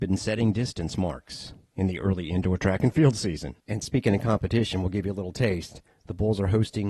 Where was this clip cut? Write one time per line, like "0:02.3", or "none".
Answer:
none